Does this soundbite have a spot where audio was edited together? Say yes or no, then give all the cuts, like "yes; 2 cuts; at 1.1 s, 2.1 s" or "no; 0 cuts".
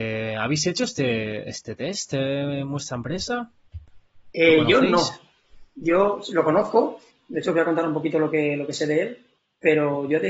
no; 0 cuts